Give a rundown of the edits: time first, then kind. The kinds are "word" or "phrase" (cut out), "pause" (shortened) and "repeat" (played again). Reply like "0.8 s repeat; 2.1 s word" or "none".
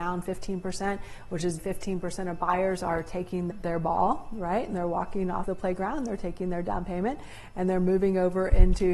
1.6 s word; 3.5 s word; 5.4 s word

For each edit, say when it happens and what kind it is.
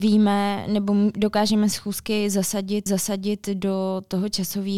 1.7 s phrase; 2.9 s repeat

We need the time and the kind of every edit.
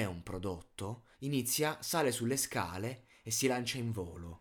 1.1 s pause

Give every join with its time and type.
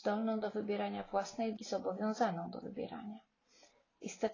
1.6 s word; 2.6 s word

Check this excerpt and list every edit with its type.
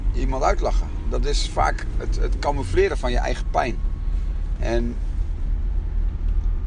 none

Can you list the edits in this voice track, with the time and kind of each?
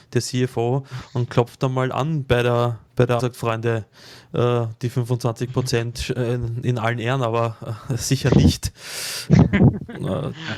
2.9 s pause; 3.2 s word

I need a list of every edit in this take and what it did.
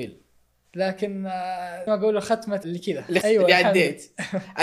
1.9 s word; 2.6 s word; 3.2 s word

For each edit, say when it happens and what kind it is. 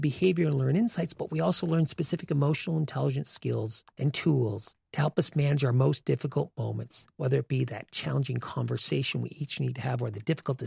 3.9 s pause; 4.8 s pause; 7.1 s pause

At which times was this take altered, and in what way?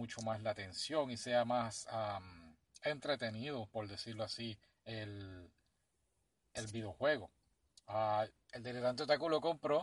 none

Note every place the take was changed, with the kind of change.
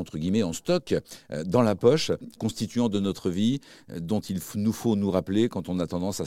2.4 s phrase

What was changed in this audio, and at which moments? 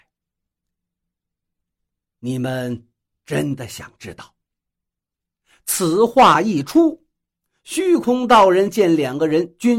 none

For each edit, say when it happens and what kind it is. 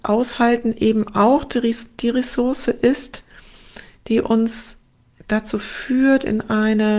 none

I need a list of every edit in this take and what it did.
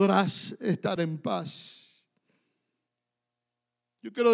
none

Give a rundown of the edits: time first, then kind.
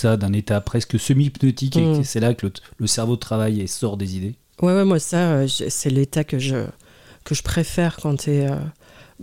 none

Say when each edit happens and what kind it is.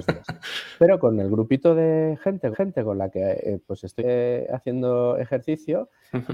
2.5 s repeat; 4.0 s word

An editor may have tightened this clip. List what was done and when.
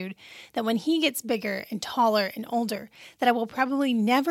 none

